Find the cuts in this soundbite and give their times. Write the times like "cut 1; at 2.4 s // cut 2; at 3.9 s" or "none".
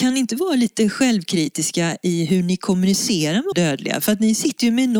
cut 1; at 3.5 s